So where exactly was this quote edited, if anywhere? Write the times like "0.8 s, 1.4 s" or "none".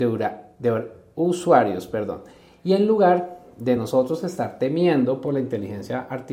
none